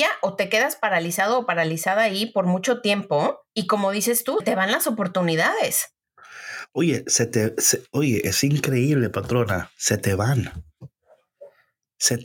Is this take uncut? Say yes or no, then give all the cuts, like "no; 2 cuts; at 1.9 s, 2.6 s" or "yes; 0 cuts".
no; 2 cuts; at 3.5 s, 4.4 s